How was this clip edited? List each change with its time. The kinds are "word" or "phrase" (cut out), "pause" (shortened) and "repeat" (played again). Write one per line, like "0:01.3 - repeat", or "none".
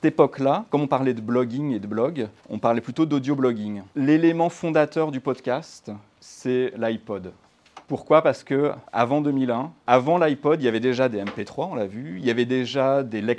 0:02.4 - pause
0:03.9 - pause
0:06.1 - pause
0:07.8 - pause
0:08.8 - pause
0:09.8 - pause